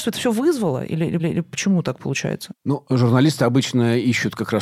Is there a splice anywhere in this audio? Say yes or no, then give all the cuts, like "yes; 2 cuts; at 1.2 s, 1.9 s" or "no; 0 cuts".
yes; 1 cut; at 1.2 s